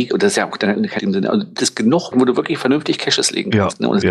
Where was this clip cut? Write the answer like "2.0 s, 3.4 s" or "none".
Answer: 1.0 s, 1.6 s, 2.1 s